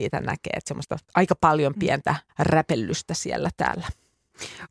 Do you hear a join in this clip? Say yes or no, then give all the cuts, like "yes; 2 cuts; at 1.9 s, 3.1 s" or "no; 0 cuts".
yes; 2 cuts; at 1.1 s, 2.3 s